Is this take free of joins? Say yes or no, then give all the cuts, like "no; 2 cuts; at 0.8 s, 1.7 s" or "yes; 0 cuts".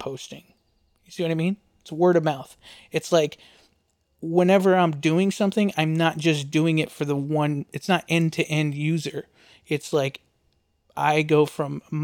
yes; 0 cuts